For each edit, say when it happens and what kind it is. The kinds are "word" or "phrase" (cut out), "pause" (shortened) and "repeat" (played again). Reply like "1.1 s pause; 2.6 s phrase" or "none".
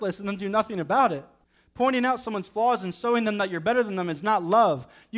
1.4 s pause